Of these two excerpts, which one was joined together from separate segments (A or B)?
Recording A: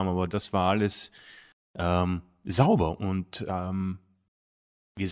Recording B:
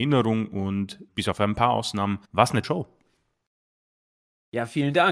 B